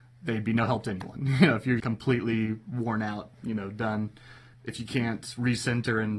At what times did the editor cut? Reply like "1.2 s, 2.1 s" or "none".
1.8 s, 3.3 s, 4.5 s